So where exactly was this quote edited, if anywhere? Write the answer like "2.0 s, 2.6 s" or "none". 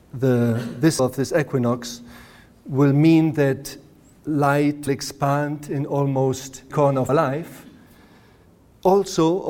1.0 s, 4.9 s, 6.7 s, 7.1 s